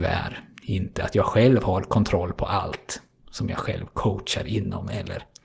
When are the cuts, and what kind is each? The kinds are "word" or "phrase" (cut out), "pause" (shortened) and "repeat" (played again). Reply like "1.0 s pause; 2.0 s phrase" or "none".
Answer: none